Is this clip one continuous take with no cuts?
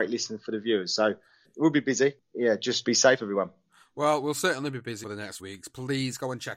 no; 4 cuts; at 1.4 s, 2.8 s, 5.0 s, 5.4 s

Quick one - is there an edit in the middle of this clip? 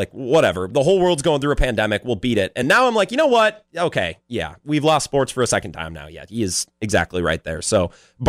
no; 0 cuts

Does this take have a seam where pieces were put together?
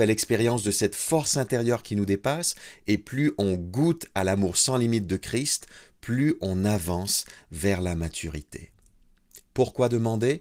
no; 0 cuts

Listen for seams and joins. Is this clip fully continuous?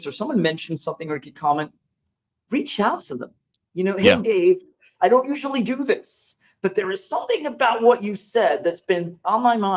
yes; 0 cuts

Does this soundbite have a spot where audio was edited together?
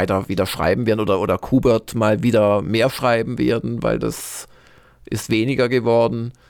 no; 0 cuts

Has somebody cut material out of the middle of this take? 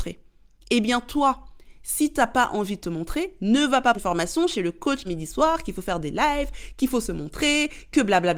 yes; 2 cuts; at 3.9 s, 5.0 s

